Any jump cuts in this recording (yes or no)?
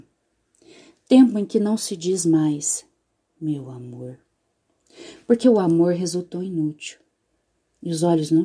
no